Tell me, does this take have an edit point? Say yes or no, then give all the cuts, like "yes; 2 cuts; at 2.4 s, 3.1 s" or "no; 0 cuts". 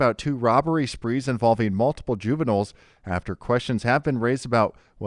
no; 0 cuts